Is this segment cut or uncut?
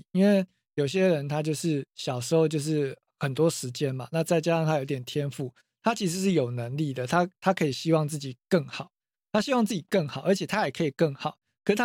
cut